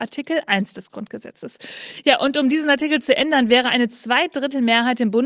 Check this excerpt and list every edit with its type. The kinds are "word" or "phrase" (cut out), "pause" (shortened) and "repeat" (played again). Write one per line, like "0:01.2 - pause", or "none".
none

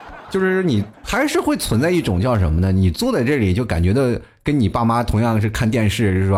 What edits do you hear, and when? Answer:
0:00.9 - pause

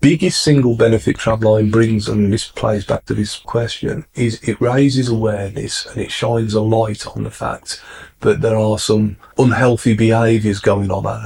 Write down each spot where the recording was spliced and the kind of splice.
0:02.1 - word
0:03.4 - word
0:09.3 - word

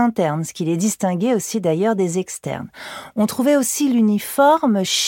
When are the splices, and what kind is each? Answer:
none

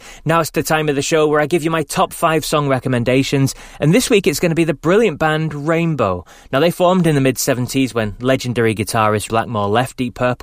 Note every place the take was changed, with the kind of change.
0:09.3 - word

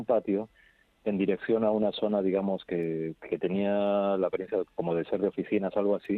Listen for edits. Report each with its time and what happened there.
none

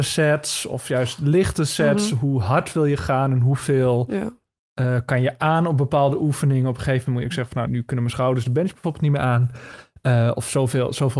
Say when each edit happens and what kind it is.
0:07.7 - word

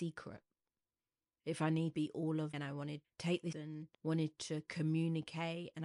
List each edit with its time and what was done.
0:01.9 - word
0:02.5 - word
0:03.0 - word
0:03.5 - word
0:03.9 - pause

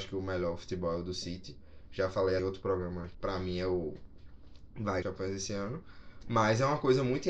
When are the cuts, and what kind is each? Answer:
0:02.4 - word
0:03.1 - word
0:05.0 - phrase

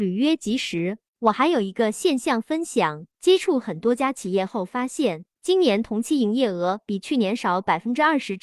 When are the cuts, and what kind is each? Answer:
0:01.1 - pause
0:03.1 - pause
0:05.3 - pause

